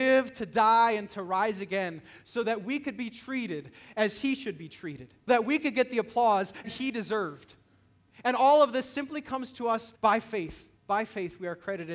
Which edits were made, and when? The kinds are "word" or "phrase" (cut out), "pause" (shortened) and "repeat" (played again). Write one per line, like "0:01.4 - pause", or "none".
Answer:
0:05.3 - word
0:06.6 - word
0:10.0 - pause
0:10.8 - pause